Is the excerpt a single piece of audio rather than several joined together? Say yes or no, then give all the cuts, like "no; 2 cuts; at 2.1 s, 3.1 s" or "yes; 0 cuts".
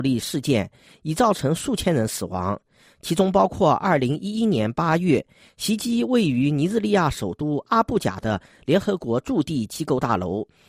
yes; 0 cuts